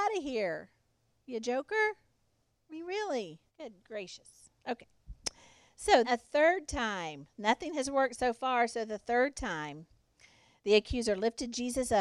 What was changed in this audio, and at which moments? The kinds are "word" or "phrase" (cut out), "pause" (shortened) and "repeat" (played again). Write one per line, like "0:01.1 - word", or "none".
0:03.5 - pause
0:06.0 - word